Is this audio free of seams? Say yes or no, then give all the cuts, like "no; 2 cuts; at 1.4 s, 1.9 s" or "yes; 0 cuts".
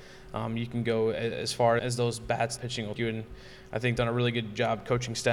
no; 4 cuts; at 1.8 s, 2.6 s, 3.0 s, 4.0 s